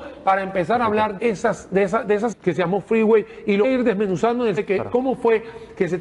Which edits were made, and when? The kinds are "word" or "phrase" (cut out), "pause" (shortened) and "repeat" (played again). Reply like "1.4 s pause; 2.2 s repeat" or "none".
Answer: 1.2 s word; 2.3 s word; 3.6 s word; 4.6 s word